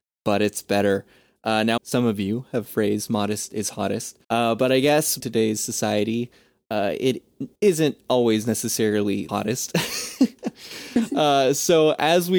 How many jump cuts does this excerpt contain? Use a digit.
6